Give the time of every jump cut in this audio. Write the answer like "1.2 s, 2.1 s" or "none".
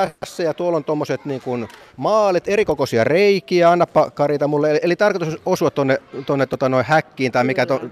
1.9 s